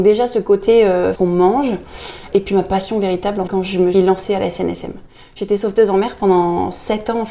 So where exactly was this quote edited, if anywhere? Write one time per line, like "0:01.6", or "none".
0:01.2
0:03.5
0:03.9